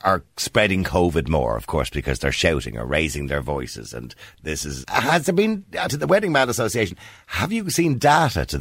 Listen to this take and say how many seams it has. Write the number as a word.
two